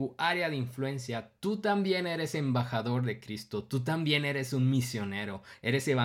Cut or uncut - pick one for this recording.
uncut